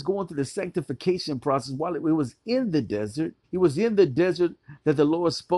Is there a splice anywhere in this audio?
yes; 1 cut; at 3.4 s

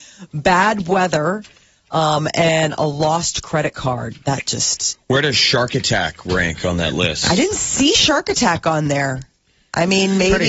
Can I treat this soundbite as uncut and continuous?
yes; 0 cuts

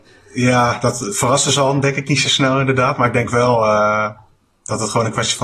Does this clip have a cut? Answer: no; 0 cuts

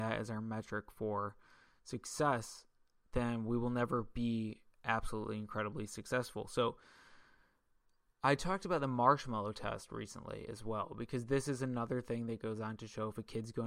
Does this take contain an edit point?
no; 0 cuts

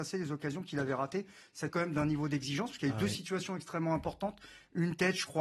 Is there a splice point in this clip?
yes; 1 cut; at 1.7 s

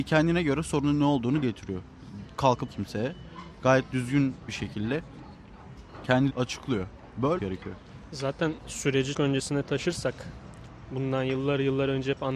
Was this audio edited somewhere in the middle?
yes; 6 cuts; at 1.4 s, 2.7 s, 4.5 s, 6.3 s, 7.4 s, 9.1 s

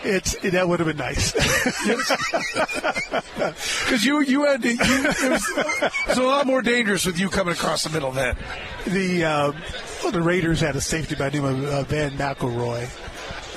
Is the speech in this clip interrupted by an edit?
no; 0 cuts

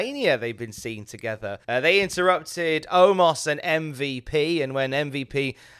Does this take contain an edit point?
yes; 1 cut; at 1.6 s

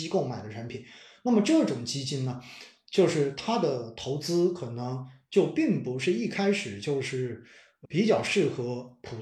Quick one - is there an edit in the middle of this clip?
yes; 1 cut; at 7.8 s

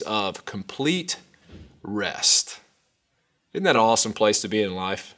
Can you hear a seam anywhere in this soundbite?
no; 0 cuts

